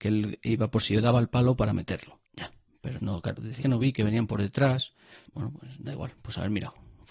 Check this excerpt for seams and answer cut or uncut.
cut